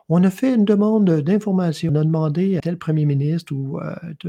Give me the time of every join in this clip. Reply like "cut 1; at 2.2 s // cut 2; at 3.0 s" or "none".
cut 1; at 1.9 s // cut 2; at 2.6 s